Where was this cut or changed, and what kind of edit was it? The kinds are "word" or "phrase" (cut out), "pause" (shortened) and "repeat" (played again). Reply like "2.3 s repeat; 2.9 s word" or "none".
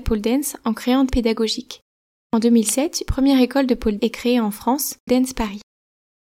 1.1 s word; 3.1 s word; 4.0 s word; 5.1 s word

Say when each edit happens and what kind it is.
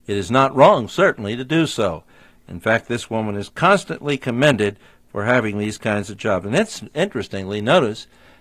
none

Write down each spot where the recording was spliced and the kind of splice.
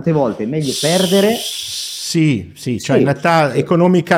none

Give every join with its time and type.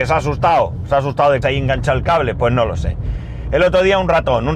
1.4 s word

